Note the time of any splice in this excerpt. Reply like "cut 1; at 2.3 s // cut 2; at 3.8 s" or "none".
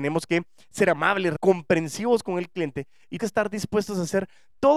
cut 1; at 1.4 s // cut 2; at 3.2 s

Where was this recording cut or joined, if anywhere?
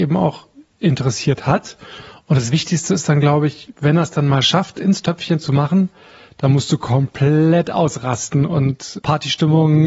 none

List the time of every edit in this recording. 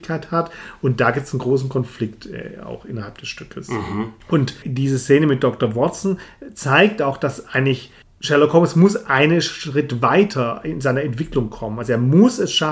none

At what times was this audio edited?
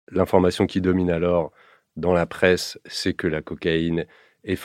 none

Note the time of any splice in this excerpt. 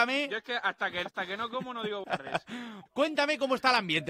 cut 1; at 1.1 s // cut 2; at 2.0 s // cut 3; at 2.9 s

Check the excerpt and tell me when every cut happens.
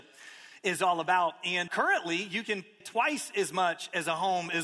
cut 1; at 1.7 s // cut 2; at 2.8 s

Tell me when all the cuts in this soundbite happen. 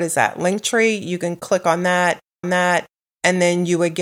cut 1; at 2.4 s

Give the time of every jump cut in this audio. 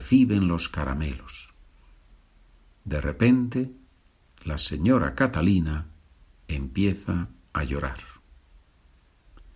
none

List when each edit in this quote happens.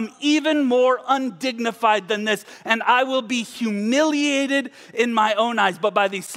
none

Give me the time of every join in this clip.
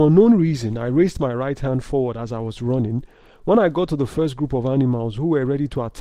none

